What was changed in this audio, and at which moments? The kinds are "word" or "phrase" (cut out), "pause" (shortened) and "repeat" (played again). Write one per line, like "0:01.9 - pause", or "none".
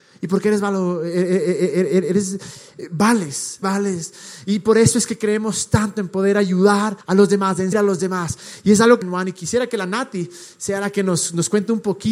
0:03.6 - word
0:07.0 - pause
0:07.7 - word
0:09.0 - phrase